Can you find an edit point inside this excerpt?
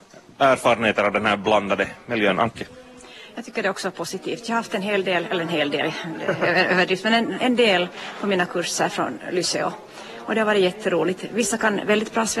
no; 0 cuts

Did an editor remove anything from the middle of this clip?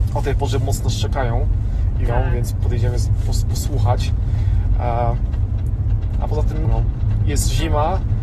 yes; 2 cuts; at 2.1 s, 6.6 s

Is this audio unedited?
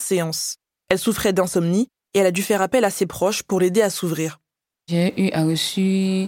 yes; 0 cuts

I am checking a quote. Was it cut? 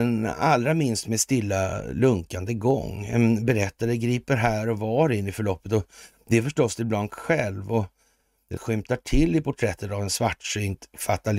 yes; 1 cut; at 8.6 s

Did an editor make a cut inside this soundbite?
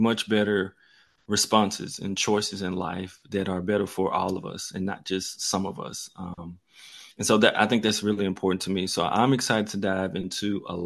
yes; 1 cut; at 7.1 s

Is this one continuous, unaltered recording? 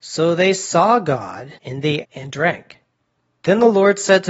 no; 2 cuts; at 1.6 s, 2.0 s

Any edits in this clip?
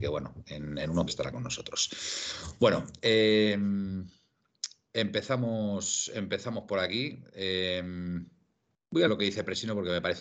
yes; 2 cuts; at 1.1 s, 9.1 s

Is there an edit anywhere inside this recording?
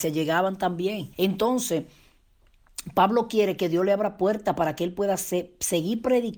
yes; 1 cut; at 1.1 s

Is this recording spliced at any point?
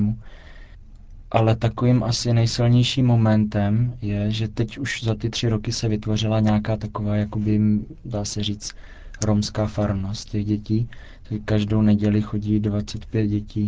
no; 0 cuts

